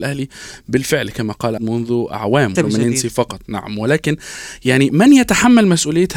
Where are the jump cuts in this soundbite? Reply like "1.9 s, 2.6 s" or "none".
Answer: 1.6 s, 2.6 s